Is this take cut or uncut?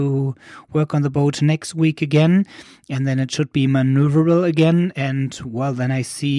uncut